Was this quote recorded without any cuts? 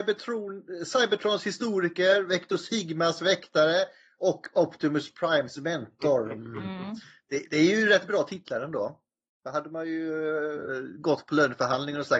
yes; 0 cuts

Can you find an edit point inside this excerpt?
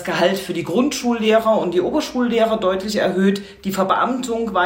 no; 0 cuts

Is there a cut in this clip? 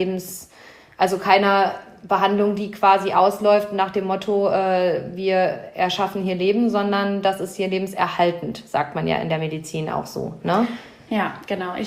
no; 0 cuts

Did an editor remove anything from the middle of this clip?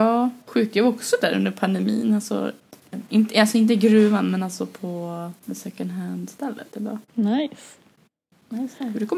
yes; 2 cuts; at 5.4 s, 7.1 s

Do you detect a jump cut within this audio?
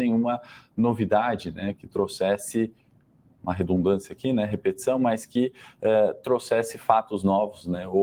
no; 0 cuts

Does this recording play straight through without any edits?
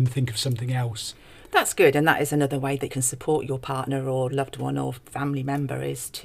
no; 1 cut; at 2.9 s

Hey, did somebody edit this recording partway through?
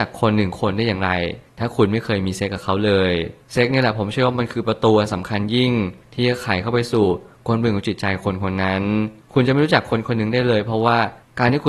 no; 0 cuts

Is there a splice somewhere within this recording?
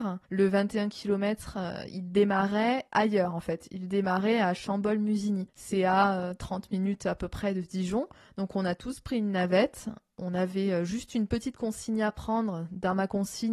no; 0 cuts

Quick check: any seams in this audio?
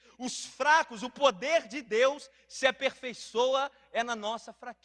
no; 0 cuts

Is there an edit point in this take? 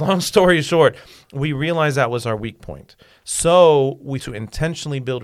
yes; 1 cut; at 4.2 s

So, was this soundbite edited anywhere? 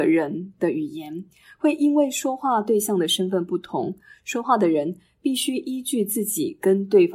no; 0 cuts

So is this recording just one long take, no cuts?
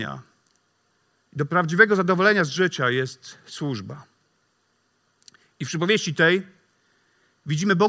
yes; 0 cuts

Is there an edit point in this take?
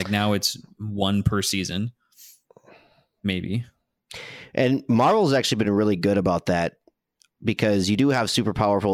no; 0 cuts

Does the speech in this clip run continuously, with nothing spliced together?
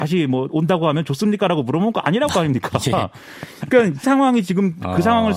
no; 2 cuts; at 2.3 s, 4.0 s

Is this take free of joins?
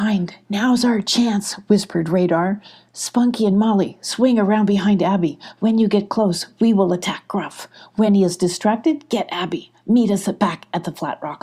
yes; 0 cuts

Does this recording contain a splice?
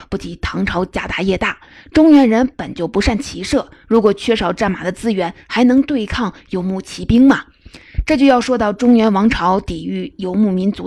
no; 0 cuts

